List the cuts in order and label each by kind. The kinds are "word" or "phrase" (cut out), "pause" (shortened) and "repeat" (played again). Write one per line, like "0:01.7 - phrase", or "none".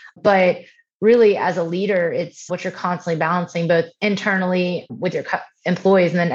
0:02.5 - word

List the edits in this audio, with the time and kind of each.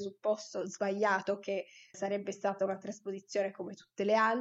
0:01.9 - word

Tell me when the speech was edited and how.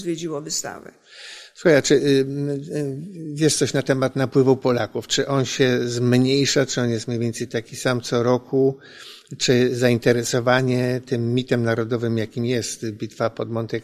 none

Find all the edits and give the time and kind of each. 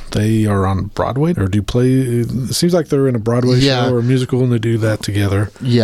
0:01.3 - word

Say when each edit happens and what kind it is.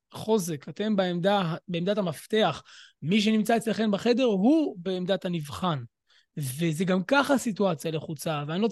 none

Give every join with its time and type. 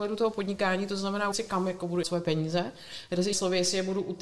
0:01.3 - word
0:02.0 - word
0:03.3 - word

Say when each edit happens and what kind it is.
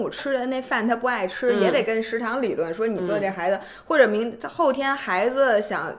none

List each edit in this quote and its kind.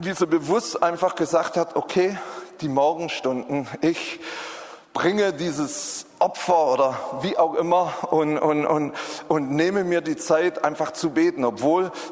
none

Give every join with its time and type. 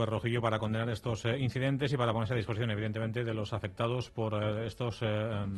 none

